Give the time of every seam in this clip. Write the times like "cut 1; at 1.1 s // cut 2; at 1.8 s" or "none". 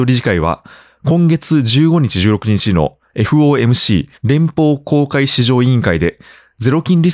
none

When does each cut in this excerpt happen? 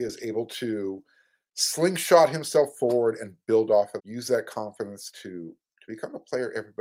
cut 1; at 4.0 s

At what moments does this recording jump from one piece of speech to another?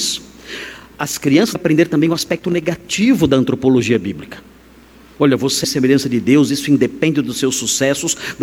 cut 1; at 1.5 s // cut 2; at 5.6 s

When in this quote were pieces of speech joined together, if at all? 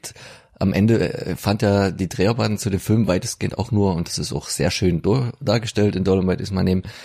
none

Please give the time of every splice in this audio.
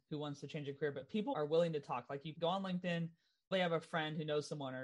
cut 1; at 1.3 s // cut 2; at 2.3 s // cut 3; at 3.5 s

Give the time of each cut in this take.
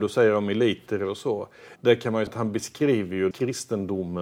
cut 1; at 1.8 s // cut 2; at 2.3 s // cut 3; at 3.3 s

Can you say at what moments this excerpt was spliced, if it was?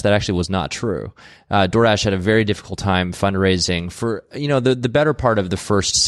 none

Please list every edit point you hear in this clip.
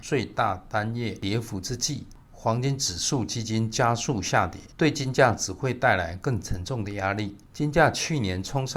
cut 1; at 4.7 s

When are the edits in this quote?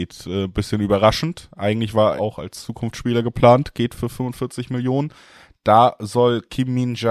cut 1; at 2.2 s

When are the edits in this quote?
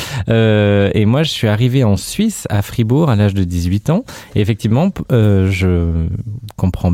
none

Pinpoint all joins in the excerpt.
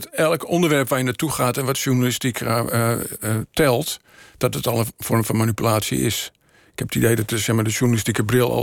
none

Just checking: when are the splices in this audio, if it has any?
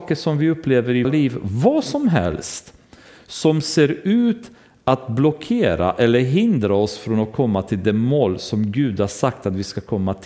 cut 1; at 1.0 s

